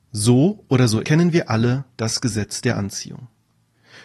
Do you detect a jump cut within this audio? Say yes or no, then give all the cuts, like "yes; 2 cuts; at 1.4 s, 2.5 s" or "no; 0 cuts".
yes; 1 cut; at 1.0 s